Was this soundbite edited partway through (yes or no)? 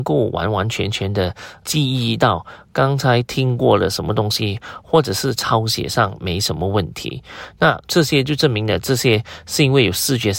yes